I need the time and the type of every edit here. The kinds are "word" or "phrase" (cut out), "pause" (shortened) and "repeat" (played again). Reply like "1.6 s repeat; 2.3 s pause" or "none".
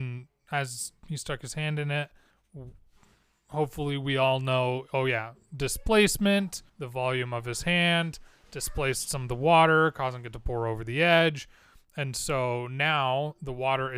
6.7 s pause

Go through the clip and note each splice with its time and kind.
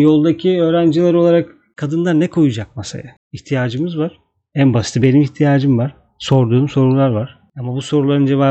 none

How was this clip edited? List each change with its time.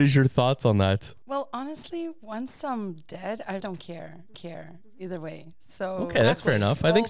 3.6 s word; 4.3 s repeat

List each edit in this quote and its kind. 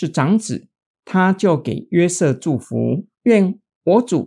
3.1 s pause

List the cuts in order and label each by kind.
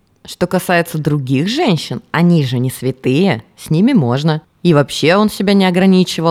4.4 s pause

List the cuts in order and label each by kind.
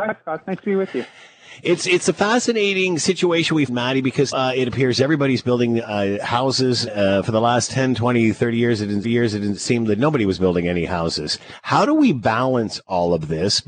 3.7 s phrase; 4.3 s word; 6.9 s word; 9.0 s repeat

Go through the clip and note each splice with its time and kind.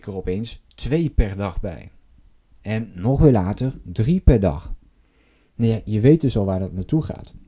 none

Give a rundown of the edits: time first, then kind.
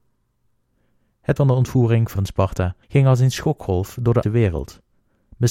1.4 s word; 2.2 s word; 2.8 s pause; 4.2 s word

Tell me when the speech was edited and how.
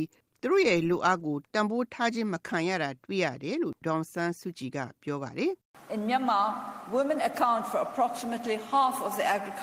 none

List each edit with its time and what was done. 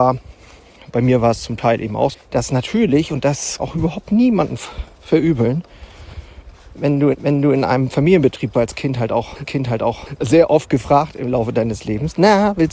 2.1 s word; 3.6 s phrase; 4.9 s pause; 7.1 s repeat; 8.5 s phrase; 9.5 s repeat

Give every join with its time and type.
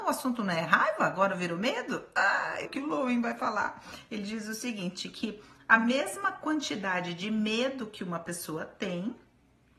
2.7 s word

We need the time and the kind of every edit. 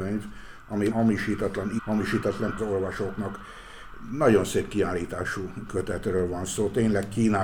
0.9 s word; 1.8 s word; 2.6 s phrase

